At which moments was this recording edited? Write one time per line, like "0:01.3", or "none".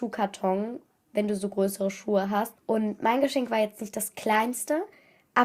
0:02.6